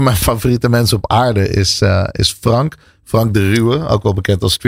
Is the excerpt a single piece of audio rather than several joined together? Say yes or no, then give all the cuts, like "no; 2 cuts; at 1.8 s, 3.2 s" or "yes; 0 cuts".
yes; 0 cuts